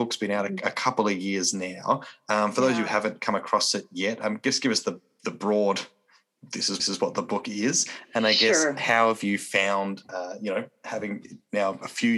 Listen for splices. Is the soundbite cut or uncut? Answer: cut